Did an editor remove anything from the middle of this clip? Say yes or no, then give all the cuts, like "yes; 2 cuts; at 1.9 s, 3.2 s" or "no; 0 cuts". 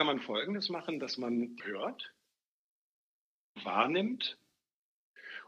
yes; 1 cut; at 1.6 s